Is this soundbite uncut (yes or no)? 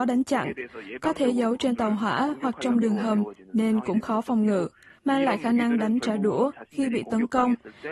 yes